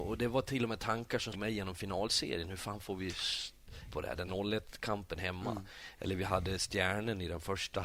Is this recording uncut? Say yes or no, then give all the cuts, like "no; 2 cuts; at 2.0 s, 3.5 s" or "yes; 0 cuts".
no; 3 cuts; at 1.3 s, 3.9 s, 4.3 s